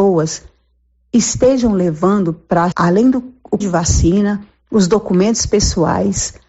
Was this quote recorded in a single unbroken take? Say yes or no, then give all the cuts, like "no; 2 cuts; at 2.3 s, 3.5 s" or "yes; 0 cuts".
no; 2 cuts; at 2.7 s, 3.6 s